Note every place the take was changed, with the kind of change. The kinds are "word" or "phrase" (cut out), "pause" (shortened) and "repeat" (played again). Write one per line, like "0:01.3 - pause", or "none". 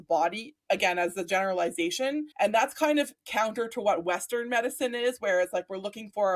0:02.3 - pause